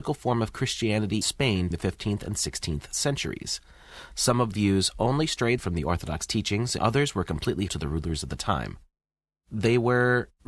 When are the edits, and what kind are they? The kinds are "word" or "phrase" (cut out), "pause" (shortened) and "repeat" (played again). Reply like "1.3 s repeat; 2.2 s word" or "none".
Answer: 1.2 s word; 1.7 s word; 4.5 s word; 5.6 s word; 6.8 s word; 7.7 s word